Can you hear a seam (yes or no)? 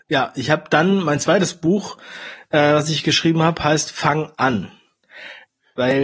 no